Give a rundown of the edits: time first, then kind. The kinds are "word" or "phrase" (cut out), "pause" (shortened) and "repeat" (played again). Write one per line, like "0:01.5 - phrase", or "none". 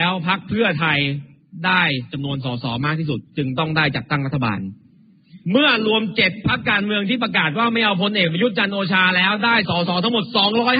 0:03.3 - pause
0:05.4 - pause